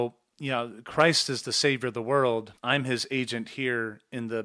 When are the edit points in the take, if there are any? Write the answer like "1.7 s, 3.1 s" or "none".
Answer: 2.6 s

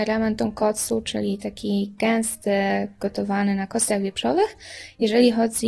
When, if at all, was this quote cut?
none

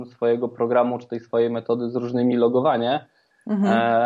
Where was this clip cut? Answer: 2.3 s

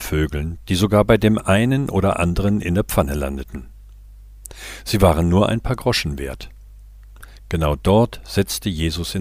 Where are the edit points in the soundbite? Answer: none

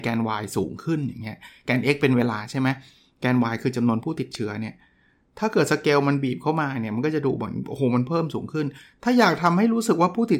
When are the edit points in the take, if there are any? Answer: none

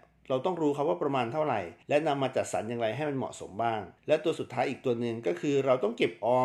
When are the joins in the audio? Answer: 1.8 s, 4.0 s

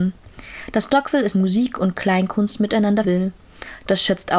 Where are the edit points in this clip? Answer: 1.3 s, 3.0 s

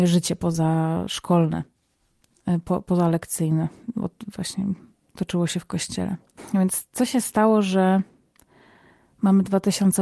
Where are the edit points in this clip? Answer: none

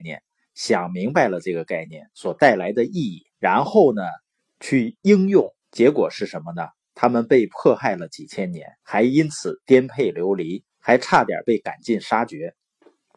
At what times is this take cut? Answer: 3.3 s, 4.4 s, 5.6 s, 8.8 s, 10.7 s

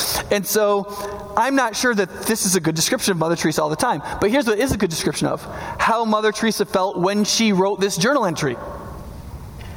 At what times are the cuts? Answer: none

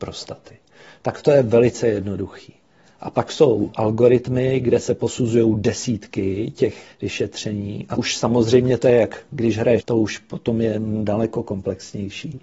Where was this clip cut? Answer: 3.7 s, 6.9 s, 8.0 s, 9.8 s

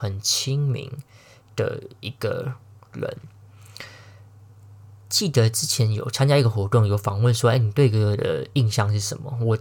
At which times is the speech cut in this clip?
none

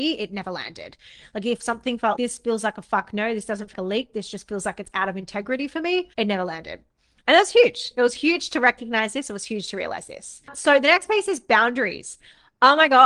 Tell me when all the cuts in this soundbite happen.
2.2 s, 3.7 s, 6.1 s

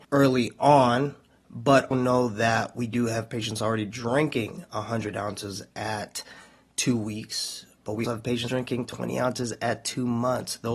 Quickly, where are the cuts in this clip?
1.9 s, 8.0 s, 8.5 s

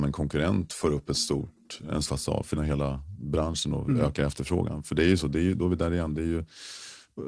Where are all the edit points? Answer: 2.0 s, 2.6 s

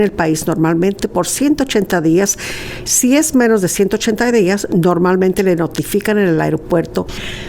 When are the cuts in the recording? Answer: none

